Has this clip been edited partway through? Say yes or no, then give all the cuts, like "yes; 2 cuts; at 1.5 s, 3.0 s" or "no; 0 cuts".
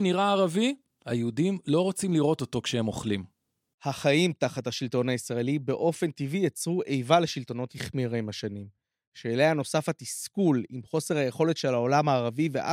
yes; 1 cut; at 7.7 s